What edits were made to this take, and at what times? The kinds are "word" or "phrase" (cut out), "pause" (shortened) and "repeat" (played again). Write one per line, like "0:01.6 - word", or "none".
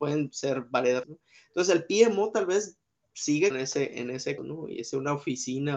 0:01.0 - word
0:03.5 - word
0:04.4 - word